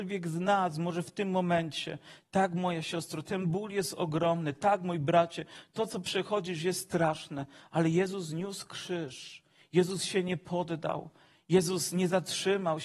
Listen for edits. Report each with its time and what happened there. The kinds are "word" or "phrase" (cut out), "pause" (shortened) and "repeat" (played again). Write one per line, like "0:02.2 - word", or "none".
none